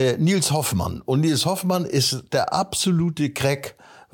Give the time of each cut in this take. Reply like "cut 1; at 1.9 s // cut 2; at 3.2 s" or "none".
none